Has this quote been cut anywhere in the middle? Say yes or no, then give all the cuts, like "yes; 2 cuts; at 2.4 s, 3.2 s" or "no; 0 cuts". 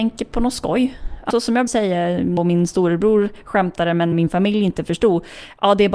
yes; 4 cuts; at 1.3 s, 1.7 s, 2.4 s, 4.1 s